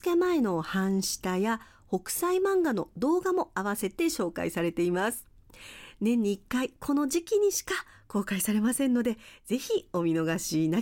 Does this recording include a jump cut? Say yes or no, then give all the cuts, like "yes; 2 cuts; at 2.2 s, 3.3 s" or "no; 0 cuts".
no; 0 cuts